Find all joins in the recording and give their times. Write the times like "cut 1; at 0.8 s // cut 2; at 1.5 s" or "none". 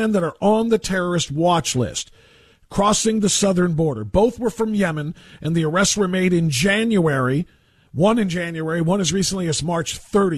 none